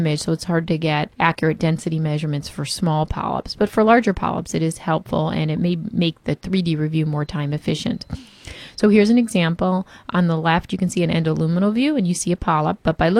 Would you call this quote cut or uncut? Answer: cut